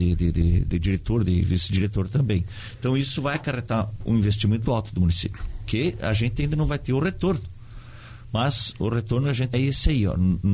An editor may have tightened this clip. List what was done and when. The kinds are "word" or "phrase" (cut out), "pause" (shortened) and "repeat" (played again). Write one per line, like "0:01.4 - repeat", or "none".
0:04.7 - word
0:09.5 - word

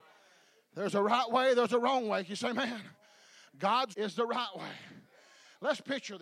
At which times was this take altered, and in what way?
0:03.9 - word

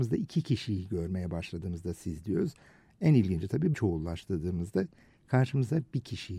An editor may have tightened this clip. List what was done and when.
0:03.7 - word

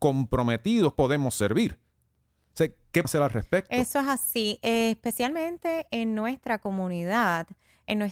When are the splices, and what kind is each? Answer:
0:01.0 - word
0:03.0 - word

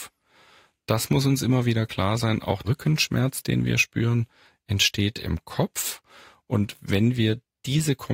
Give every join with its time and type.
0:02.6 - word

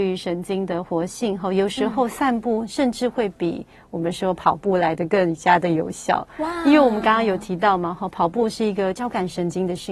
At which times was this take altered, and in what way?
none

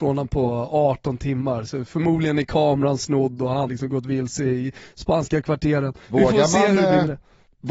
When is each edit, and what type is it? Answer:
0:03.7 - word
0:06.0 - pause

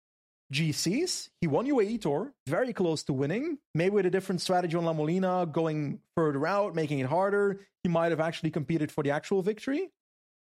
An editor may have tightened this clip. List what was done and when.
0:02.5 - phrase
0:03.7 - pause

